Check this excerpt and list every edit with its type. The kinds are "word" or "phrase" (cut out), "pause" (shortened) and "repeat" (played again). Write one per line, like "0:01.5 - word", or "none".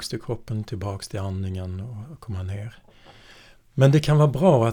none